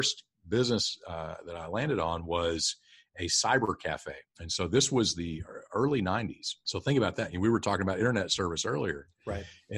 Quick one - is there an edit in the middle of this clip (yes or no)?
yes